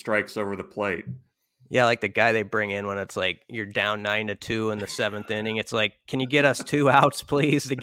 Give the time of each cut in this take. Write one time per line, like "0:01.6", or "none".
none